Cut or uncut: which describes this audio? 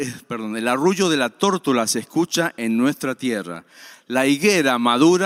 uncut